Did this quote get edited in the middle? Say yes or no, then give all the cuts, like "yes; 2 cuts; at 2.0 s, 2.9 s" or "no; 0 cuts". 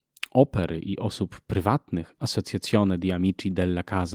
no; 0 cuts